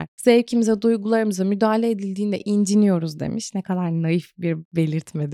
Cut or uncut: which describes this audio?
uncut